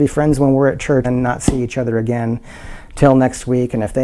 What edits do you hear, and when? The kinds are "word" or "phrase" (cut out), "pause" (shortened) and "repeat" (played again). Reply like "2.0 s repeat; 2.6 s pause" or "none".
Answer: 1.0 s word